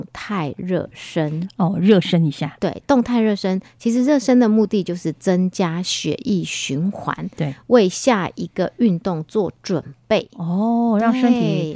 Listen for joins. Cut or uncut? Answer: uncut